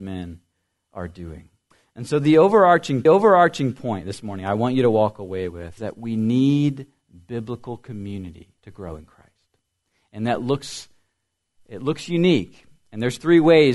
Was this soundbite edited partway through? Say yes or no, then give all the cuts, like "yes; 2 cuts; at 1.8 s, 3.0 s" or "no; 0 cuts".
yes; 4 cuts; at 1.7 s, 3.1 s, 5.8 s, 8.6 s